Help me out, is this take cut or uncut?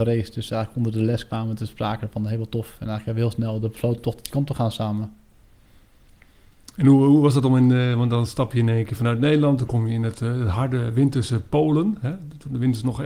uncut